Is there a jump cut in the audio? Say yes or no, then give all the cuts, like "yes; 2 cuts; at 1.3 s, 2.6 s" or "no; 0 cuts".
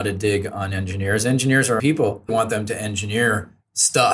yes; 2 cuts; at 1.8 s, 2.3 s